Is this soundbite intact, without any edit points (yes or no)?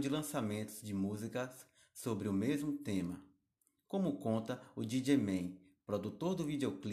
yes